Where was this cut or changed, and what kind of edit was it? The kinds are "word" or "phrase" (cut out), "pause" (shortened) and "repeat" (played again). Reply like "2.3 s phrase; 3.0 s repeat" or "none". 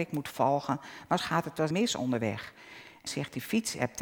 1.2 s word; 1.7 s word; 3.1 s word

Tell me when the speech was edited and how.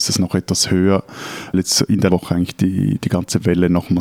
1.5 s word; 2.1 s word

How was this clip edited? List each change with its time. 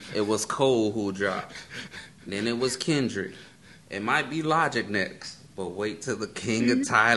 none

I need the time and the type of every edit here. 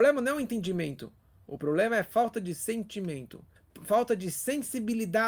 none

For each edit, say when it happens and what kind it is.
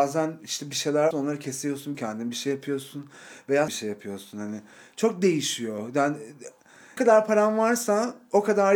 1.1 s word; 1.9 s word; 3.7 s word; 7.0 s word

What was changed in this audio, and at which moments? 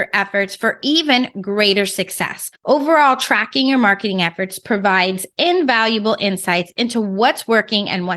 2.6 s pause

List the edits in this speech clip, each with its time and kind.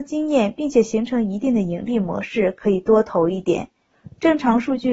none

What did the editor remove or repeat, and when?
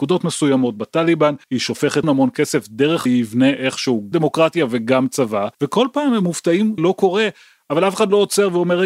1.4 s pause; 2.0 s word; 3.1 s phrase; 4.1 s word; 5.5 s pause; 6.8 s word

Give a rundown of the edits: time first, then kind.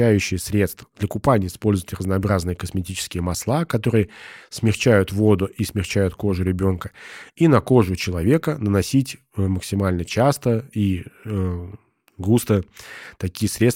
none

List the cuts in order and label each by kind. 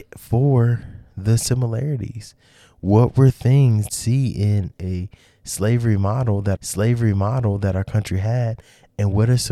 3.9 s phrase; 4.8 s word; 6.6 s repeat

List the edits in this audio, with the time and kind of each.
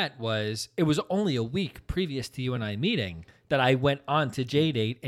none

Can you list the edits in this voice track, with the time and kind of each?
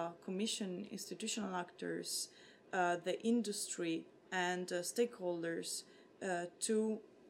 none

